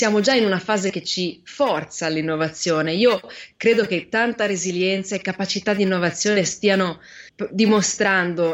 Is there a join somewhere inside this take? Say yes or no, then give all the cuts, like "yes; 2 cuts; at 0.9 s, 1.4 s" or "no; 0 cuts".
yes; 1 cut; at 7.3 s